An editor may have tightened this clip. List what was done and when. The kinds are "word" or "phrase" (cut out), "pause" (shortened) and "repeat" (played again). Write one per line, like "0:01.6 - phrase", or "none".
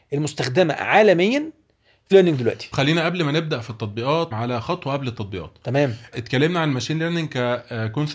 0:02.1 - word
0:02.7 - word
0:04.3 - word
0:06.1 - word